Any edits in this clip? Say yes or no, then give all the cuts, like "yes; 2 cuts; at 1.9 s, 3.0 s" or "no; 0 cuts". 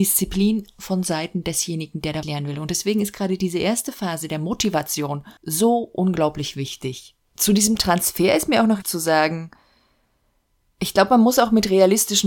yes; 4 cuts; at 2.2 s, 5.4 s, 7.3 s, 8.8 s